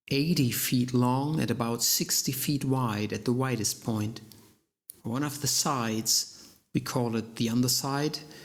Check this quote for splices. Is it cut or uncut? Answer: cut